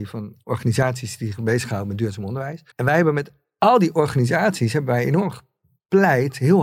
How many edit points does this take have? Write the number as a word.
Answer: one